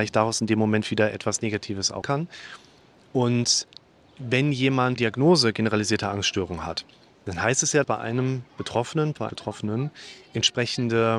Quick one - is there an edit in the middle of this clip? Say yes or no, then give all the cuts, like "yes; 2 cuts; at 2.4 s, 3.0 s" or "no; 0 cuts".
yes; 4 cuts; at 2.0 s, 5.0 s, 7.8 s, 9.3 s